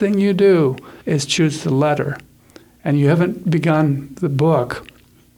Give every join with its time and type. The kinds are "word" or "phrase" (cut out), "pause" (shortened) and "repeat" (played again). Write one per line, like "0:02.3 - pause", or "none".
0:01.0 - pause